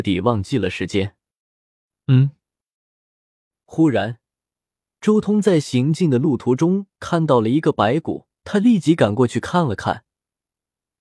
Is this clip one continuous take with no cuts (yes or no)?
no